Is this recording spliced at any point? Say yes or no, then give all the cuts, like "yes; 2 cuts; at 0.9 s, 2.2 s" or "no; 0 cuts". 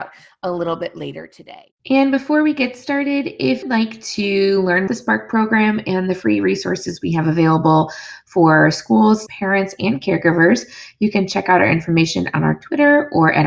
yes; 4 cuts; at 1.8 s, 3.6 s, 4.9 s, 9.3 s